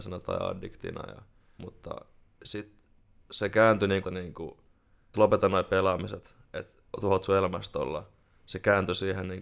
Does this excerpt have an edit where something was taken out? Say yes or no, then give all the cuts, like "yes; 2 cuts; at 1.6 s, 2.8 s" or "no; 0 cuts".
yes; 5 cuts; at 1.6 s, 3.0 s, 4.0 s, 5.1 s, 6.9 s